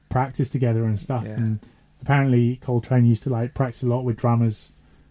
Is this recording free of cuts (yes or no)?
yes